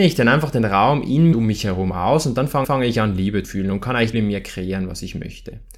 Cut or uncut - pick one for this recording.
cut